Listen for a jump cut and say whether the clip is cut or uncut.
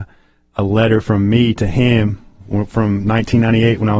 uncut